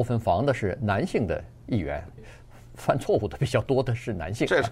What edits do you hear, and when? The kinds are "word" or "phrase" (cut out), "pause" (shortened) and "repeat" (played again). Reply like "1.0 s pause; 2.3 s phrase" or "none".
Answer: 2.2 s phrase